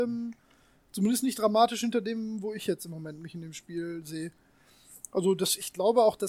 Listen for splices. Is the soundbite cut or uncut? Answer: uncut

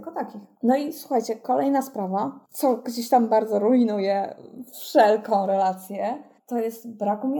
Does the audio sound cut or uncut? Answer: uncut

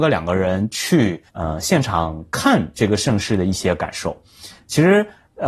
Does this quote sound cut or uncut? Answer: cut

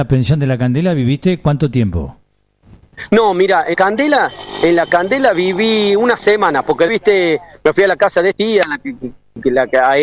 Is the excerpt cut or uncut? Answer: cut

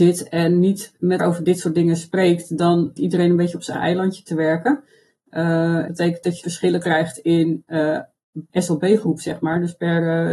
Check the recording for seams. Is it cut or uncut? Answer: cut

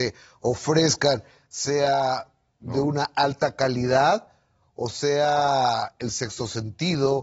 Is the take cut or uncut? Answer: uncut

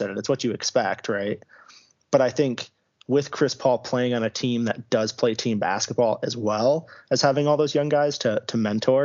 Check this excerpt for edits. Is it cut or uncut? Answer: uncut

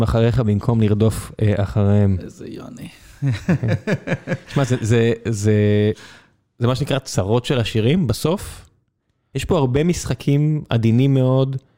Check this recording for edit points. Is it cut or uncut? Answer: uncut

